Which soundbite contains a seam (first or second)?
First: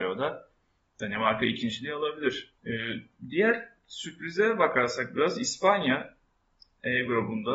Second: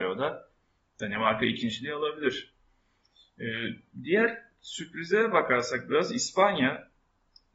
first